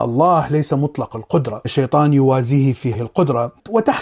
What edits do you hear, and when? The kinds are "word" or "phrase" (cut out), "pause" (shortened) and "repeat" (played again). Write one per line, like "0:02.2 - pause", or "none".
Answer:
0:01.6 - word
0:02.9 - word